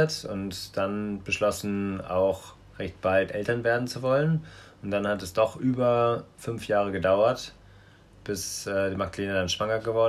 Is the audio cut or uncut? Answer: uncut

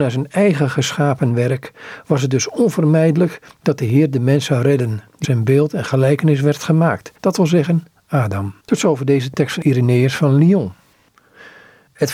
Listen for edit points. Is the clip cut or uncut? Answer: cut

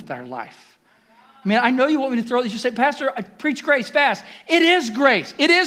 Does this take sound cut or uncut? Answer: uncut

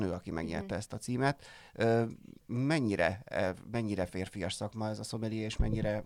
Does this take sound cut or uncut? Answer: uncut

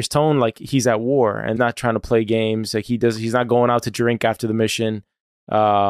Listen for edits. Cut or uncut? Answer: cut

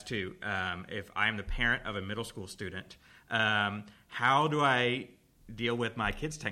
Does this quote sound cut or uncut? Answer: uncut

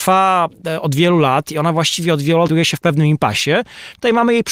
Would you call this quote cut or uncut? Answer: cut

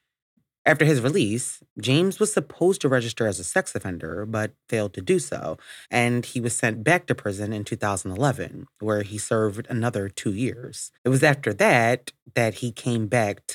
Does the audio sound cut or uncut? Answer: cut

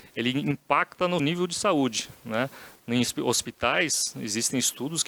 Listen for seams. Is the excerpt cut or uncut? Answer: cut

